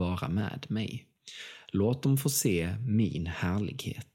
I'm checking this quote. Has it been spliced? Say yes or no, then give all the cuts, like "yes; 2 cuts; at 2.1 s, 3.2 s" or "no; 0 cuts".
no; 0 cuts